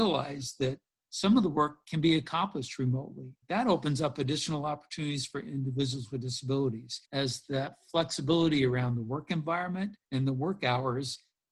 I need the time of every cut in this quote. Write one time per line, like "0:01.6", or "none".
0:03.4
0:07.1
0:10.0